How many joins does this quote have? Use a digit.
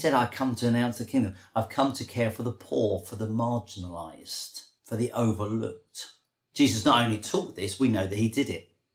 2